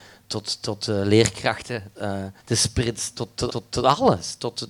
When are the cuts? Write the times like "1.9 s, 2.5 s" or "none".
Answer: 1.9 s, 2.4 s, 3.5 s